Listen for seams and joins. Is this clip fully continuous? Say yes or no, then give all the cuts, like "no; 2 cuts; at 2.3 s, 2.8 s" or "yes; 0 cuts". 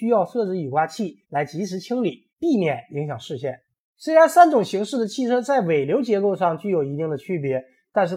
no; 3 cuts; at 1.2 s, 2.3 s, 3.8 s